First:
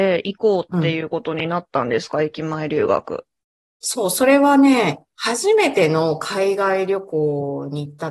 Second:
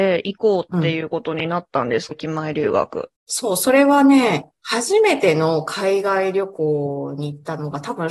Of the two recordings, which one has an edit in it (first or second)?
second